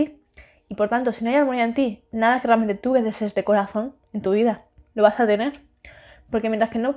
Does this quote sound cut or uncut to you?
uncut